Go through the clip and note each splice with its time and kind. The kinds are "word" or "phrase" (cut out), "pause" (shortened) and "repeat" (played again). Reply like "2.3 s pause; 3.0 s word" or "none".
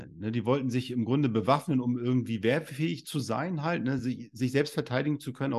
none